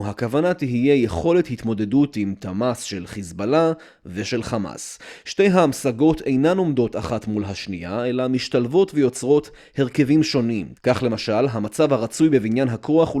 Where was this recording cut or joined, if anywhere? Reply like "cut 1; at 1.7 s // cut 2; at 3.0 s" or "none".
none